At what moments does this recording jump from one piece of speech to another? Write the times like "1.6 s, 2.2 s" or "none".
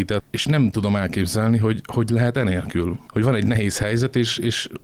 none